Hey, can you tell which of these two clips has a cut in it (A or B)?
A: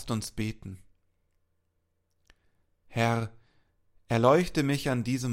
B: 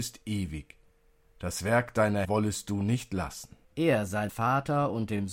B